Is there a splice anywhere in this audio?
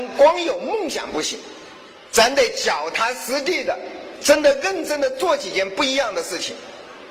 yes; 1 cut; at 2.0 s

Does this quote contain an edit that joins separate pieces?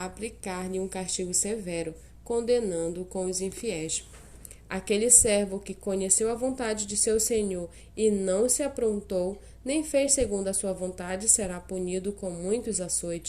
no; 0 cuts

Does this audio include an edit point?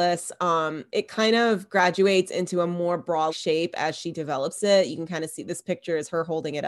yes; 1 cut; at 3.3 s

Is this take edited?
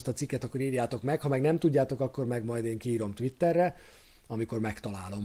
no; 0 cuts

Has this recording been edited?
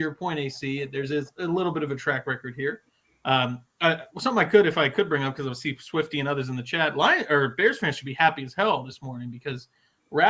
no; 0 cuts

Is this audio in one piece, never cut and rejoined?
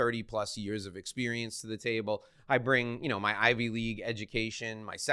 yes; 0 cuts

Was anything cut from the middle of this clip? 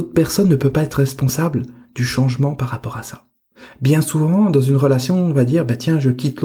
no; 0 cuts

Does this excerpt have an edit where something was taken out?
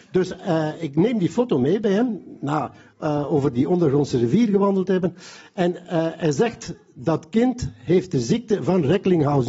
no; 0 cuts

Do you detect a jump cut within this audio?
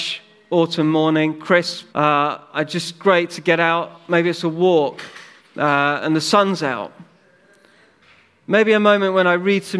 yes; 2 cuts; at 1.9 s, 5.4 s

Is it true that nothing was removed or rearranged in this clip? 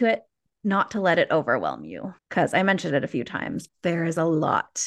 no; 2 cuts; at 2.2 s, 3.7 s

